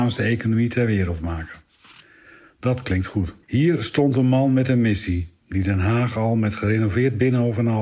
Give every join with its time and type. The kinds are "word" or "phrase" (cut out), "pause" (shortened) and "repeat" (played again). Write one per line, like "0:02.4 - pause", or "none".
0:03.4 - pause